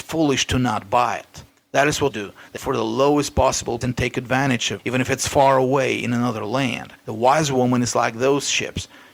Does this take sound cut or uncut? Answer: cut